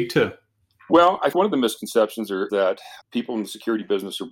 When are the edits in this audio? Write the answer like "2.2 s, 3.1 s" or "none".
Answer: 1.3 s, 2.5 s, 3.0 s